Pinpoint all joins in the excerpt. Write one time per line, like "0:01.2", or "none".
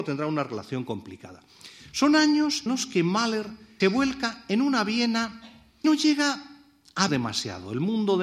0:02.7
0:03.8
0:05.8
0:07.1